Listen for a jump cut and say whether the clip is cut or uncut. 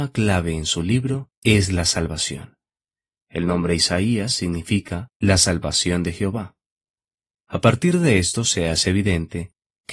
cut